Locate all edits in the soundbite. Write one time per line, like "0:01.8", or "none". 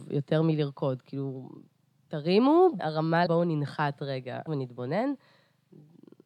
0:02.8
0:03.3
0:04.5

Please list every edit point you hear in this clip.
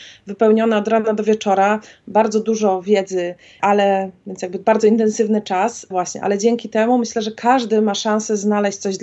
0:05.9

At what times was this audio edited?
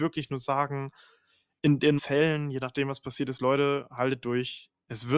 0:02.0

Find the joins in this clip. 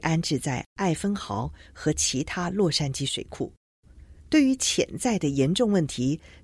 0:04.2

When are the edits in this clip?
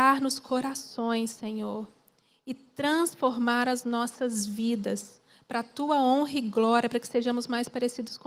none

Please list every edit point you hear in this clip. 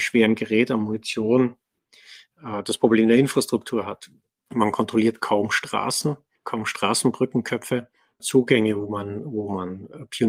0:08.2

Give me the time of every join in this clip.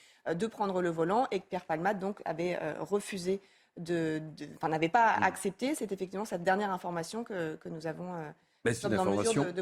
none

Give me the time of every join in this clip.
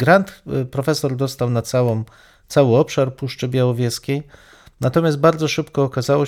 none

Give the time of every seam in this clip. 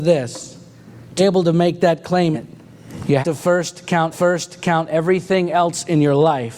0:01.2
0:02.3
0:03.2
0:04.1

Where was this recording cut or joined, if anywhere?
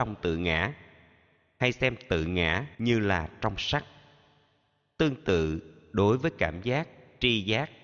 0:02.7

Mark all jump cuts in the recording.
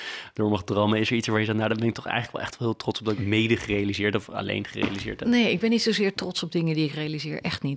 0:03.2

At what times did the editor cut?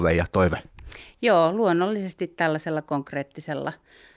none

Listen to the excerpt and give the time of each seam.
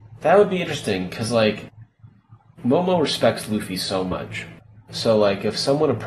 none

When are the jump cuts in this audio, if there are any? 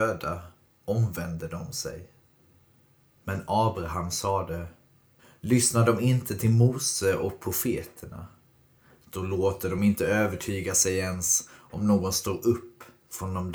none

